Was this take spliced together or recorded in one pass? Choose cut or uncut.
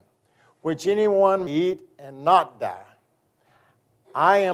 cut